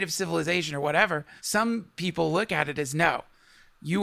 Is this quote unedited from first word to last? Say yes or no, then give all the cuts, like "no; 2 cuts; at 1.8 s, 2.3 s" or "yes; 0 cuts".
no; 1 cut; at 1.4 s